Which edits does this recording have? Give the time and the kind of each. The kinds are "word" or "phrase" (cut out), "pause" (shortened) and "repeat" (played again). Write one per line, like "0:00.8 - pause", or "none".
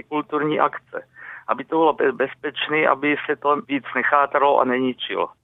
0:03.6 - pause